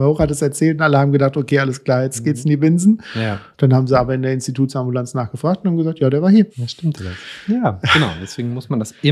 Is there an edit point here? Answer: yes; 1 cut; at 6.5 s

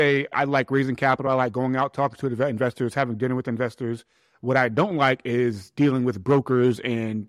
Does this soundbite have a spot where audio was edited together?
no; 0 cuts

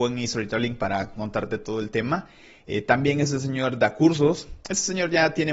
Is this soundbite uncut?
yes; 0 cuts

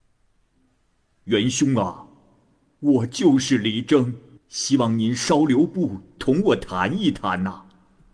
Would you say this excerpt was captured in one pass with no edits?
no; 1 cut; at 4.4 s

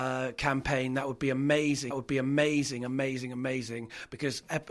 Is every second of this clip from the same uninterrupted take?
no; 1 cut; at 1.9 s

